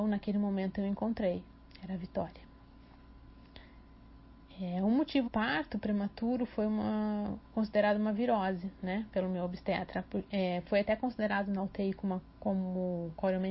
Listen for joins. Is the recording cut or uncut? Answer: cut